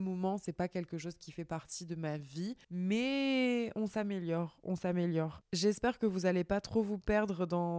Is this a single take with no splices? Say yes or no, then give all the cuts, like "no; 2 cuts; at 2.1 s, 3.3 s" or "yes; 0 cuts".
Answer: no; 1 cut; at 2.6 s